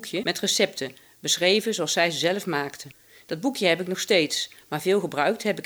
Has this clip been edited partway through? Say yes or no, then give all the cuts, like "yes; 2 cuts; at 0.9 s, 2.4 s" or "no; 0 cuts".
no; 0 cuts